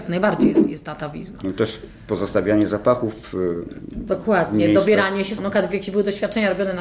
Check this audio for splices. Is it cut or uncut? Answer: cut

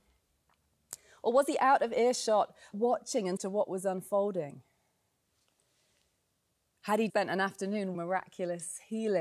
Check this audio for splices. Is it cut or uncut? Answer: cut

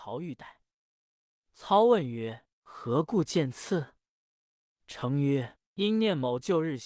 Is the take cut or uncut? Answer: uncut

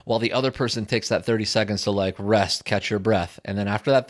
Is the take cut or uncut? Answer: uncut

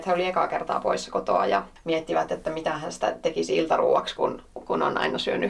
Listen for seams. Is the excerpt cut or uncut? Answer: uncut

